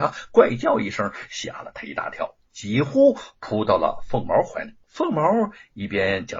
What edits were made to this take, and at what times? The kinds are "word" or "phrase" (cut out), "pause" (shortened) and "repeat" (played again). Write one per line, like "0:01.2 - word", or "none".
0:04.8 - pause